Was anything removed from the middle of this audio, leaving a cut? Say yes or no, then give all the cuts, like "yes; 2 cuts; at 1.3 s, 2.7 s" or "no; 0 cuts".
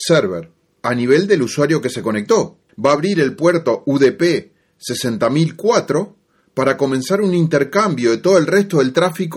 no; 0 cuts